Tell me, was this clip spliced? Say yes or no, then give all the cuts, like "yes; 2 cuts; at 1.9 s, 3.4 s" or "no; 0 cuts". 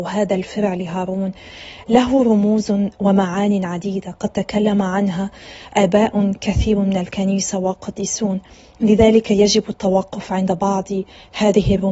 no; 0 cuts